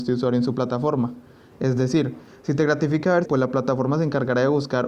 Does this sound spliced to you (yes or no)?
yes